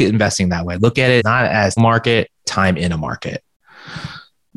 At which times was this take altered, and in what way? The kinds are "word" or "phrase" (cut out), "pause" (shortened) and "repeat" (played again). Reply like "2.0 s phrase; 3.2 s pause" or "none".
1.2 s word; 1.8 s word; 2.4 s word